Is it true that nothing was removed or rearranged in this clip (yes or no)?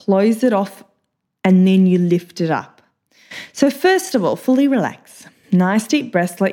yes